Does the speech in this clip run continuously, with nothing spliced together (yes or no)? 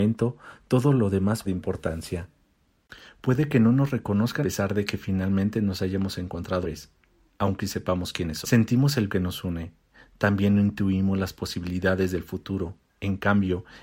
no